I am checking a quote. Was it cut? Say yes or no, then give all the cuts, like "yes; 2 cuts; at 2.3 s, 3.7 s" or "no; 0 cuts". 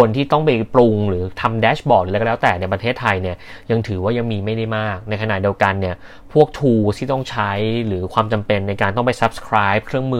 no; 0 cuts